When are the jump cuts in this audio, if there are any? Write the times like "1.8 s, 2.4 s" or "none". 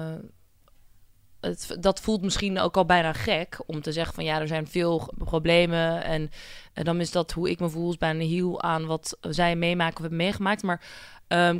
5.1 s